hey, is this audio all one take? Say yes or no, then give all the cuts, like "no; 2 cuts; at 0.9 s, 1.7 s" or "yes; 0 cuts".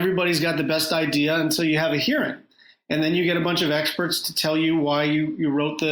yes; 0 cuts